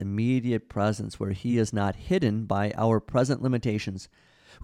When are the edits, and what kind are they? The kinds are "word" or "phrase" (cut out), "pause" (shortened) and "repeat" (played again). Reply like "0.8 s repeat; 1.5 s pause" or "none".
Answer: none